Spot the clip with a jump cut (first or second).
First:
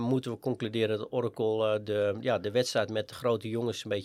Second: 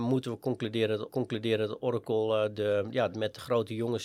second